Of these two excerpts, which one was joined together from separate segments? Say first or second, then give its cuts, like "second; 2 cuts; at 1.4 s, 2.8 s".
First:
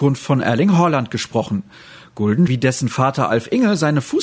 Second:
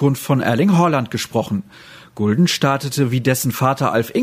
first; 1 cut; at 2.5 s